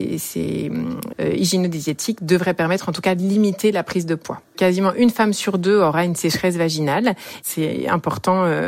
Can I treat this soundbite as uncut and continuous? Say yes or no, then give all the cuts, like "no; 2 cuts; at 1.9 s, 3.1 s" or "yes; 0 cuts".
no; 2 cuts; at 1.1 s, 4.5 s